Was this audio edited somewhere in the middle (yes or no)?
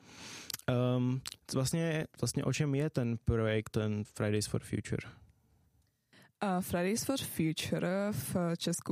yes